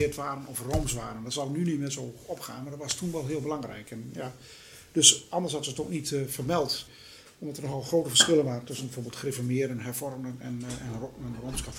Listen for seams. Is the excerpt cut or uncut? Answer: uncut